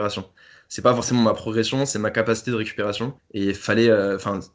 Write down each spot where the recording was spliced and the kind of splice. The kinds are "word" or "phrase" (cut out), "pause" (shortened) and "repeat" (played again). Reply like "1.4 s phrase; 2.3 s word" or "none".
3.2 s pause